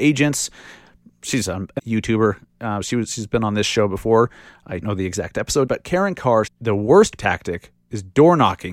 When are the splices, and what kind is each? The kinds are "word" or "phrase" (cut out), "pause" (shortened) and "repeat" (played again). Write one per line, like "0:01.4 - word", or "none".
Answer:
0:01.8 - word
0:04.8 - word
0:05.7 - word
0:06.5 - word
0:07.2 - word